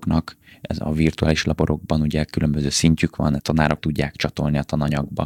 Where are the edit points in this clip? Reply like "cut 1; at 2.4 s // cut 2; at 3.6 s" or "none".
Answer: cut 1; at 3.4 s // cut 2; at 3.8 s // cut 3; at 4.1 s